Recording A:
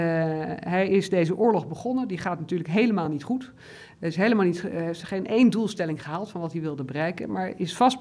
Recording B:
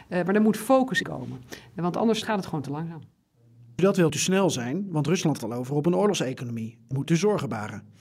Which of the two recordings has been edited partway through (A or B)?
B